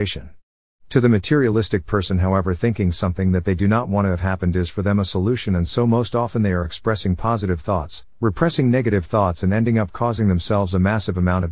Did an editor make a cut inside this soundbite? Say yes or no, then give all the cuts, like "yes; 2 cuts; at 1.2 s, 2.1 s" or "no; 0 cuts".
no; 0 cuts